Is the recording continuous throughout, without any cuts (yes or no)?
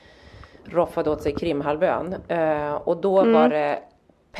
yes